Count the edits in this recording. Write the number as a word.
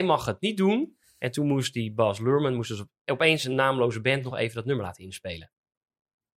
zero